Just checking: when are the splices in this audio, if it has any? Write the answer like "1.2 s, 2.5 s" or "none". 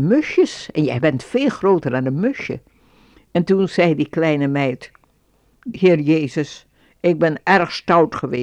none